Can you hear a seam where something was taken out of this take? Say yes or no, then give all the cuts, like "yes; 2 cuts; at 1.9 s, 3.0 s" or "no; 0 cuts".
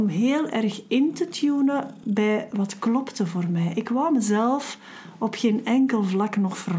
no; 0 cuts